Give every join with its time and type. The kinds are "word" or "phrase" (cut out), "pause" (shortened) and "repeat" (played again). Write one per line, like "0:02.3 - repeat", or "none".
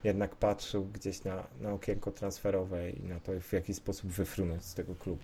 none